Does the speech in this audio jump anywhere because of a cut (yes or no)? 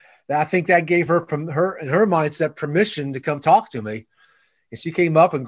no